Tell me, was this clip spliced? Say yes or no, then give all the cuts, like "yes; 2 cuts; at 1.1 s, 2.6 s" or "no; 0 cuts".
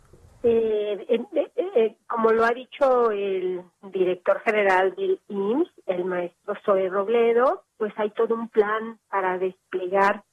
no; 0 cuts